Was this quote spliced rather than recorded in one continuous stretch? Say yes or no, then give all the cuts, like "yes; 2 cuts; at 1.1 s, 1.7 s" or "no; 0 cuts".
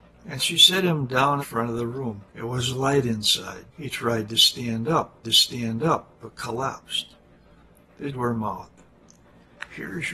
yes; 5 cuts; at 1.4 s, 2.3 s, 3.7 s, 5.2 s, 8.1 s